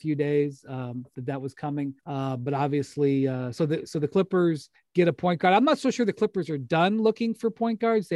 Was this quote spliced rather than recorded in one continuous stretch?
yes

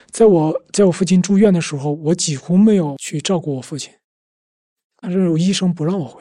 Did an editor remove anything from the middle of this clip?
no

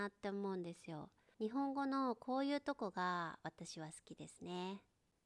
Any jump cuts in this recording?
no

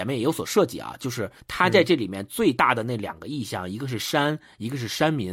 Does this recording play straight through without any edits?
no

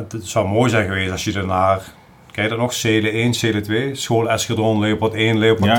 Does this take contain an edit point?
no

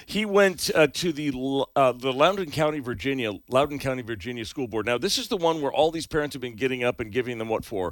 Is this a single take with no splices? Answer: no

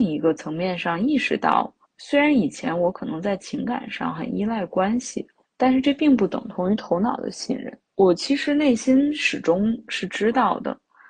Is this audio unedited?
no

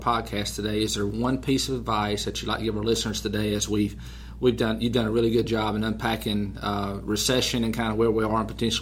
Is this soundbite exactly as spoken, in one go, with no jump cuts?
yes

